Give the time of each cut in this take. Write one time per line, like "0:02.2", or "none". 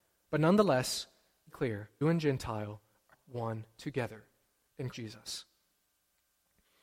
0:01.5
0:02.0
0:03.1
0:04.9